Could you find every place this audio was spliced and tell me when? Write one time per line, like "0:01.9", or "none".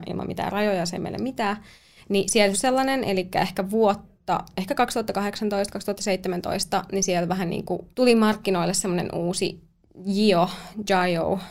0:01.0
0:02.5
0:07.9